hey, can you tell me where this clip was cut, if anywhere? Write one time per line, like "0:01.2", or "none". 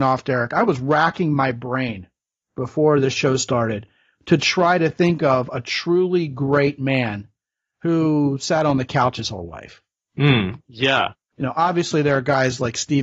none